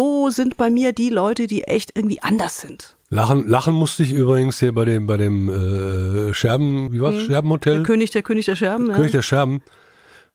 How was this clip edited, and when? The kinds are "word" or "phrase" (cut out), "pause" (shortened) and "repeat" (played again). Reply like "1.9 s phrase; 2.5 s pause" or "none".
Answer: 3.0 s pause; 6.9 s word